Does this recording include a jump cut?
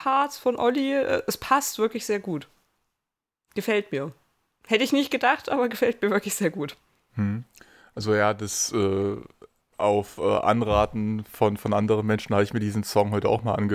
no; 0 cuts

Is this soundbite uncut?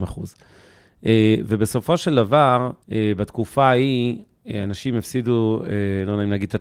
no; 1 cut; at 2.8 s

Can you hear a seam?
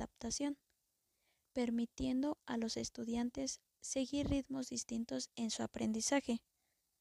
no; 0 cuts

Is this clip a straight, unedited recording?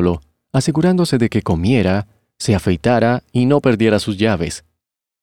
yes; 0 cuts

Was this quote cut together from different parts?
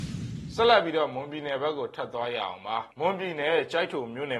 yes; 1 cut; at 2.9 s

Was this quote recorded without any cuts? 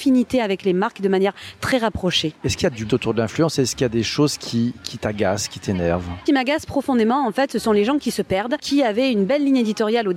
no; 2 cuts; at 2.9 s, 6.3 s

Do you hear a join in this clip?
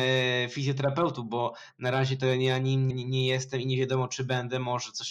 yes; 1 cut; at 2.9 s

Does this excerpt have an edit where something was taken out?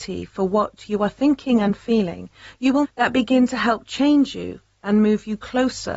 yes; 1 cut; at 2.8 s

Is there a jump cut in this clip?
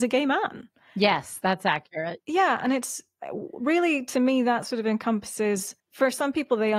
yes; 1 cut; at 5.8 s

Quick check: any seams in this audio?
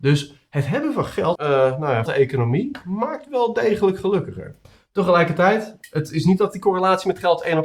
yes; 3 cuts; at 1.4 s, 2.1 s, 4.6 s

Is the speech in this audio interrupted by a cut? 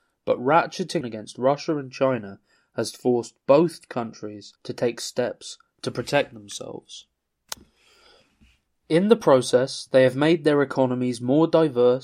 yes; 2 cuts; at 1.0 s, 4.6 s

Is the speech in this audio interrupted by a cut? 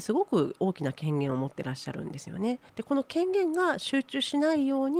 yes; 1 cut; at 2.7 s

